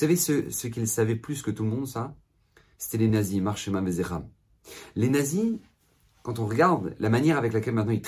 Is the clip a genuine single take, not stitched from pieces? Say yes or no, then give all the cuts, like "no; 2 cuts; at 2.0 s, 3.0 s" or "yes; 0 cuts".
yes; 0 cuts